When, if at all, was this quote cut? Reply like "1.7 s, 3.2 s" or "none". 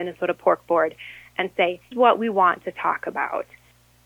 1.9 s